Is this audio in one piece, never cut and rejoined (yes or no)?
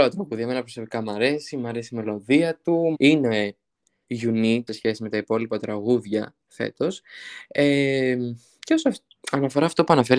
no